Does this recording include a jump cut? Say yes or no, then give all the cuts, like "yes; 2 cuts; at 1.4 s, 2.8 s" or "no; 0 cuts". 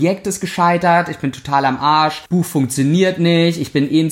yes; 1 cut; at 2.3 s